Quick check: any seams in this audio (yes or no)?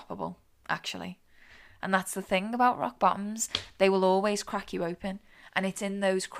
no